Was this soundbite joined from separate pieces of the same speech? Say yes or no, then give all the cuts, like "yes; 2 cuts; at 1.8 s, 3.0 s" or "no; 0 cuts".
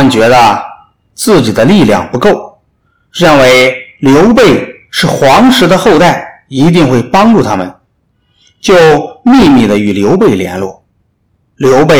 no; 0 cuts